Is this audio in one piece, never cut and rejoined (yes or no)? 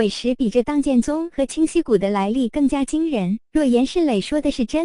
yes